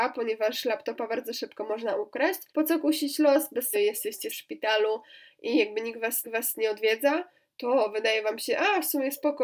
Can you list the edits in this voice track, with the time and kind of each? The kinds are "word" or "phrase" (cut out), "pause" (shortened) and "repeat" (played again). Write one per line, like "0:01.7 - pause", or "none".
0:02.5 - pause
0:03.7 - phrase
0:04.3 - word
0:06.2 - repeat